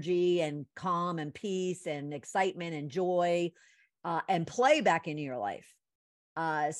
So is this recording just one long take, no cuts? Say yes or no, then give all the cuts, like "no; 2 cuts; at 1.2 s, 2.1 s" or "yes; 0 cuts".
yes; 0 cuts